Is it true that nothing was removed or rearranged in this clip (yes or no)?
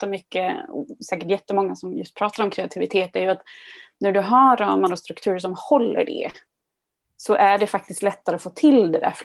yes